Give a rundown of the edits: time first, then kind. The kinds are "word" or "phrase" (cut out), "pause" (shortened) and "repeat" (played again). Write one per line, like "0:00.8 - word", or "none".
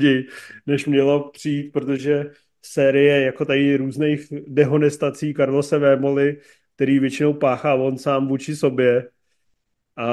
none